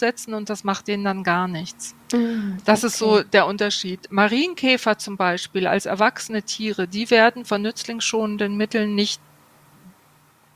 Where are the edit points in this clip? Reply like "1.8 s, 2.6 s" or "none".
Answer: 2.0 s